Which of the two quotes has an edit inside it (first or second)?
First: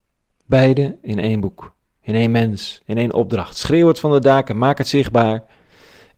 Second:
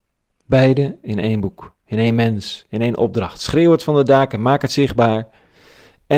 second